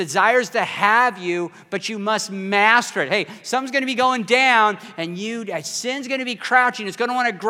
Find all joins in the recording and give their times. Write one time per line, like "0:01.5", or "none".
none